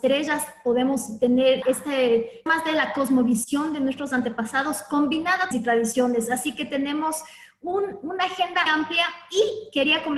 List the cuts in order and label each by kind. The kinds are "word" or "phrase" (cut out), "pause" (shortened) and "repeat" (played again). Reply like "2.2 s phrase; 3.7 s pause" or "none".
1.6 s word; 2.5 s word; 5.5 s phrase; 8.7 s word